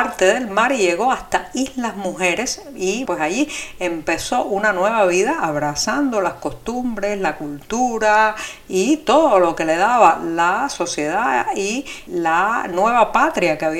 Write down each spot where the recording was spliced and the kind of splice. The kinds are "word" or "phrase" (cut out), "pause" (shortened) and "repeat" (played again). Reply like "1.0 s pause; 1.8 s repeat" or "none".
3.1 s word; 12.1 s word